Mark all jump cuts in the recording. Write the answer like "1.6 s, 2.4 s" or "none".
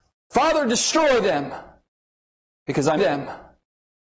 3.0 s